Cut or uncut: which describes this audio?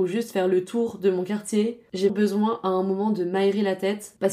cut